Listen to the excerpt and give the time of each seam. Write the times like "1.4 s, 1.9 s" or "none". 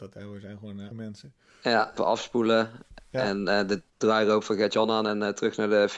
0.9 s, 2.0 s, 3.9 s